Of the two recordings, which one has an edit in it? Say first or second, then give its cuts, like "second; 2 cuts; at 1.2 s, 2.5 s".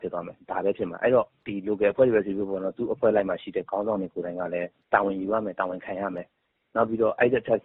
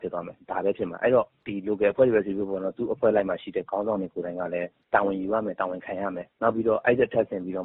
second; 1 cut; at 6.3 s